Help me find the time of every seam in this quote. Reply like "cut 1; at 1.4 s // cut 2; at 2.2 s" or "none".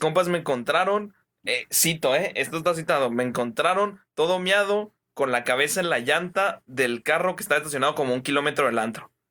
none